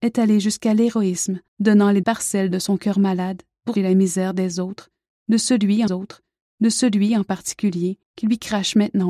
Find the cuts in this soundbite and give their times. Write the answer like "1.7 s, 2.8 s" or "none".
1.5 s, 2.0 s, 3.8 s, 5.9 s, 8.0 s